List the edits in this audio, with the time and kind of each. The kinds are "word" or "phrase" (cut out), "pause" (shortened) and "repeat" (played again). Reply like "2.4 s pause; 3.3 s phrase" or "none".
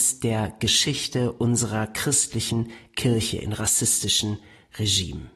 none